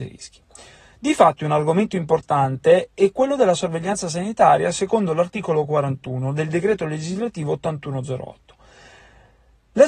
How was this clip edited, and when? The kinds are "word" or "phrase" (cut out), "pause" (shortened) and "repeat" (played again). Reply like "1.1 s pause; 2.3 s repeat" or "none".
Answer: none

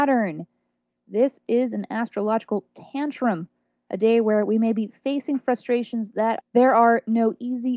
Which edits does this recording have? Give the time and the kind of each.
none

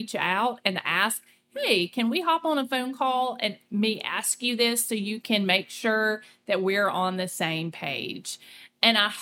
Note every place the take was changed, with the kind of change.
none

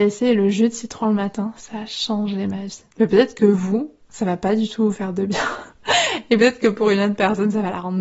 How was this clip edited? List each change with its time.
2.9 s pause

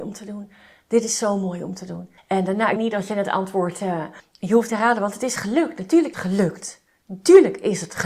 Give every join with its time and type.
2.2 s pause; 2.8 s phrase; 4.2 s pause; 4.7 s phrase; 6.1 s phrase

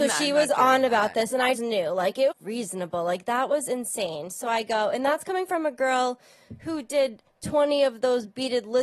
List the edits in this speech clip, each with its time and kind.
1.5 s word; 2.3 s phrase

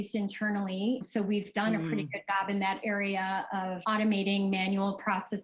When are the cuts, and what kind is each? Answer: none

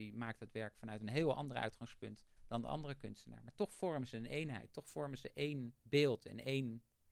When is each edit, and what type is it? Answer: 5.8 s pause

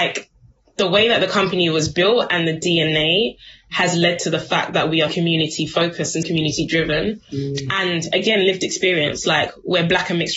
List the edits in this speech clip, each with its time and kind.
5.1 s word; 6.2 s word

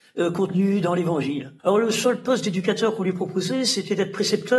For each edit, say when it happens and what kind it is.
1.6 s pause

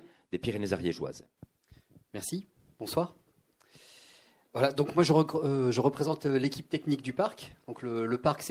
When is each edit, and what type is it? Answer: none

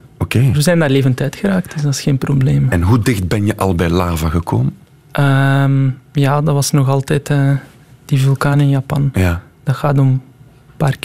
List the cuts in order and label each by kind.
none

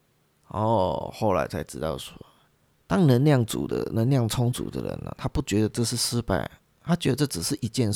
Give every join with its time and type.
none

